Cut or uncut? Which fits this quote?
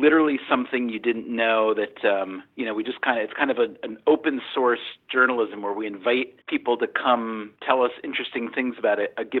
cut